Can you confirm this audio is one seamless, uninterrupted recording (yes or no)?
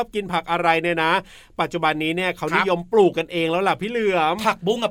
yes